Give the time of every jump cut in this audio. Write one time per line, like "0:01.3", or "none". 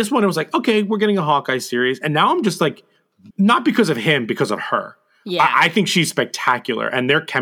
0:03.3